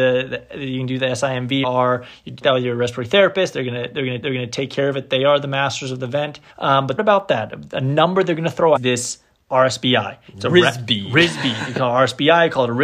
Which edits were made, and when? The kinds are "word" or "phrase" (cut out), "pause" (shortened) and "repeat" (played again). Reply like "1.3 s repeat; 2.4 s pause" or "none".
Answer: 1.6 s phrase; 2.4 s phrase; 4.2 s repeat; 6.5 s pause; 7.0 s phrase; 8.8 s phrase; 10.3 s pause